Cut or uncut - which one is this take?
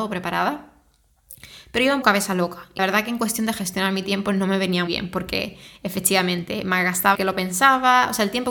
cut